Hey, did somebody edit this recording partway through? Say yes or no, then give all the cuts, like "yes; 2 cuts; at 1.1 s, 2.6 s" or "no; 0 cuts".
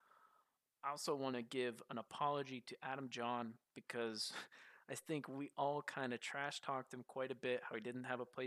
no; 0 cuts